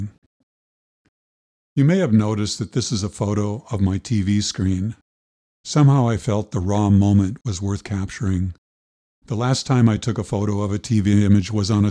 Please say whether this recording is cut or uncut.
uncut